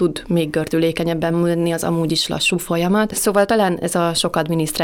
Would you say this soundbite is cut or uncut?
uncut